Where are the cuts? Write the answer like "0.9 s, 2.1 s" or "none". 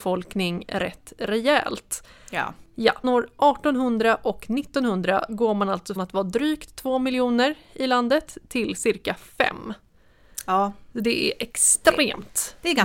3.0 s, 5.3 s, 6.0 s